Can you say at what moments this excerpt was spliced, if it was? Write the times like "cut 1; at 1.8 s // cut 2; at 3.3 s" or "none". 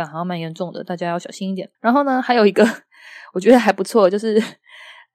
cut 1; at 1.7 s